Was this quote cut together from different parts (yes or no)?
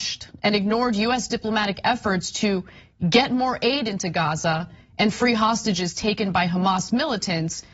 no